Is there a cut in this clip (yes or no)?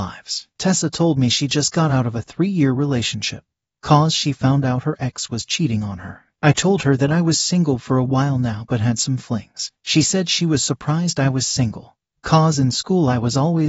no